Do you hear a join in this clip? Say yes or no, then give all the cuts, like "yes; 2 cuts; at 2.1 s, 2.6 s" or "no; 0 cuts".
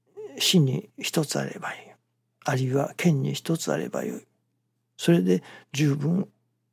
no; 0 cuts